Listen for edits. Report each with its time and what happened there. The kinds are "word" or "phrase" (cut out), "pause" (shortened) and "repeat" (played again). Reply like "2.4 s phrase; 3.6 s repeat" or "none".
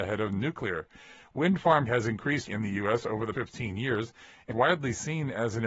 1.9 s word; 2.5 s word; 3.3 s word; 4.5 s word